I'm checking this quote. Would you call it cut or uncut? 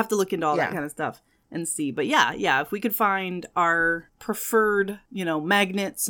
uncut